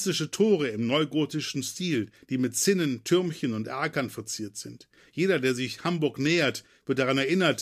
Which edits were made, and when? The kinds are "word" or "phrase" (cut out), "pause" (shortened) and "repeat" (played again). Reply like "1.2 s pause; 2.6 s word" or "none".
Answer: none